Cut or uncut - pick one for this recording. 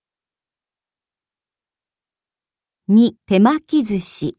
cut